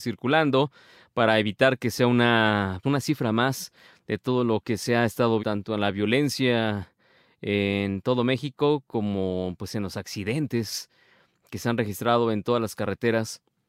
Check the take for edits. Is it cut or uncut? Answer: cut